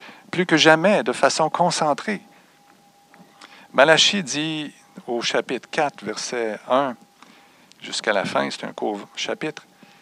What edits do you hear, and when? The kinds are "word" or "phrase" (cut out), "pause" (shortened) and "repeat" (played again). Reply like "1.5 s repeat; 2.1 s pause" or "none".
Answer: none